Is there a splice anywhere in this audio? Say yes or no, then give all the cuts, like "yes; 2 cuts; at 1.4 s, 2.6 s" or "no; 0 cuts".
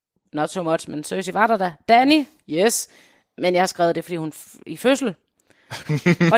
no; 0 cuts